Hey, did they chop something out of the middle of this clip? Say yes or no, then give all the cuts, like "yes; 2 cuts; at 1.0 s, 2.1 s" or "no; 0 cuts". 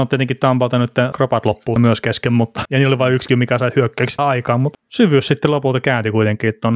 yes; 6 cuts; at 1.1 s, 1.8 s, 2.6 s, 3.3 s, 4.2 s, 4.7 s